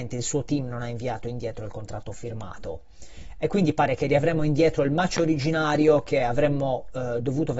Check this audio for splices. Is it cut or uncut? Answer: uncut